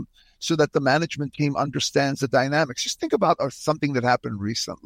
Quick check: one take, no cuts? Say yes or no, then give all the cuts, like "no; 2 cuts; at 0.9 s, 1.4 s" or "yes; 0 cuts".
yes; 0 cuts